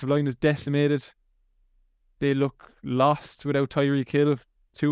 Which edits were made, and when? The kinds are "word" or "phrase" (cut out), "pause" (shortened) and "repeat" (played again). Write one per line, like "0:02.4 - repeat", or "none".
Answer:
none